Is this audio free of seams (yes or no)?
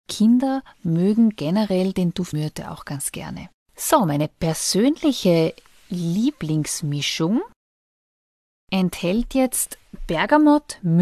no